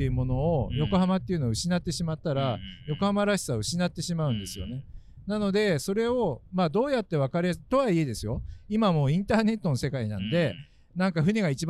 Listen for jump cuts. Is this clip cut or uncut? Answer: uncut